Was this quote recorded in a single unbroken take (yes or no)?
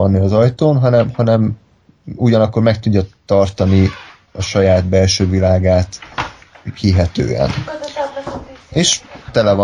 yes